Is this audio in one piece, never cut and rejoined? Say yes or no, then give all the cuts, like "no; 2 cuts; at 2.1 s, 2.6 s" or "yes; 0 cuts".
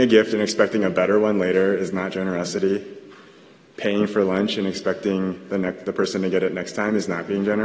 yes; 0 cuts